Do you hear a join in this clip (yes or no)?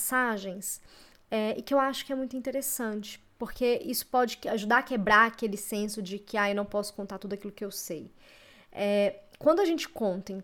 no